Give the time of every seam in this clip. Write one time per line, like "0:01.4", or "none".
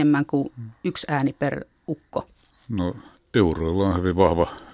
none